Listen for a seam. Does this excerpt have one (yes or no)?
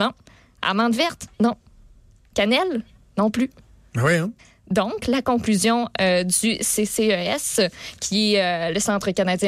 yes